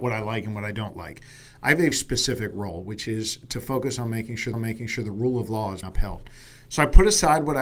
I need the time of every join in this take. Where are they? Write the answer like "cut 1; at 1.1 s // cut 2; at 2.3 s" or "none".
cut 1; at 1.9 s // cut 2; at 4.5 s // cut 3; at 5.8 s